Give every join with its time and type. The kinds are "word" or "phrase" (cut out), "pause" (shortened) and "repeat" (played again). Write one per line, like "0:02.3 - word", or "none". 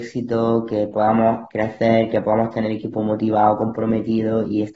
0:01.5 - word